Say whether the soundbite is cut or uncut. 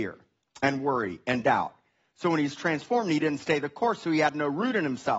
uncut